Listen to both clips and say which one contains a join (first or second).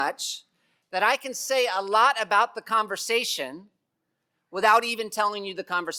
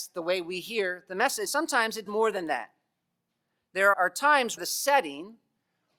second